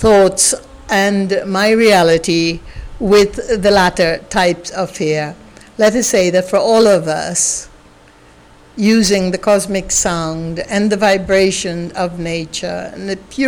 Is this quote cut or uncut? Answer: uncut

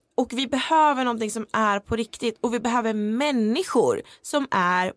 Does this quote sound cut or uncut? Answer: uncut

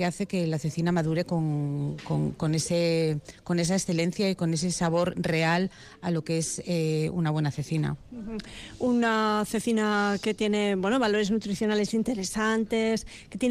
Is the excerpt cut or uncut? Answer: uncut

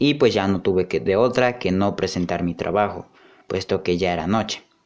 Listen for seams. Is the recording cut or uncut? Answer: uncut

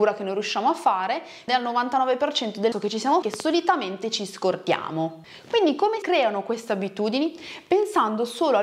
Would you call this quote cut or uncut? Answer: cut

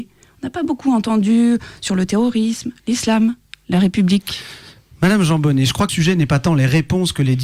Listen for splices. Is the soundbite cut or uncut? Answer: cut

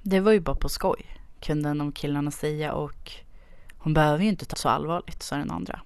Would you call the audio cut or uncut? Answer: cut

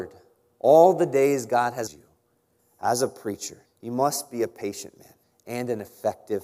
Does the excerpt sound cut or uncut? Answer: cut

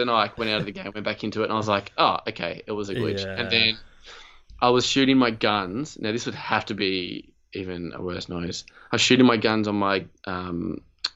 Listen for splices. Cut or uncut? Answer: uncut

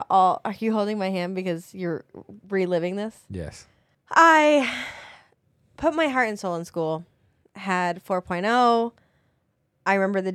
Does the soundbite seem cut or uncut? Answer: cut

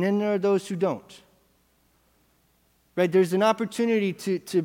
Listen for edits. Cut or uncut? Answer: uncut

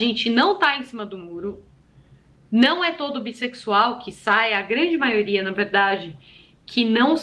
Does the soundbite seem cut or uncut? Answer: uncut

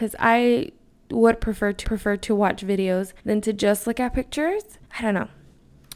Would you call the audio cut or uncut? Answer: cut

